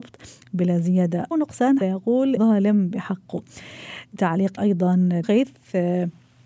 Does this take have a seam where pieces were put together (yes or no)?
yes